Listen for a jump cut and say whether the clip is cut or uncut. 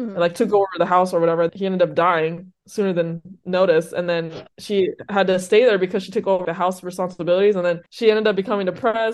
cut